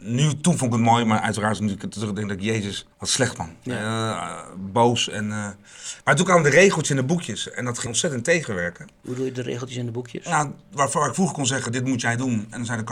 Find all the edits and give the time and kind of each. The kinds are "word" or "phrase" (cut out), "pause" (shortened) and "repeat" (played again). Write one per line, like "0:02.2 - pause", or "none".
0:02.9 - pause
0:07.9 - word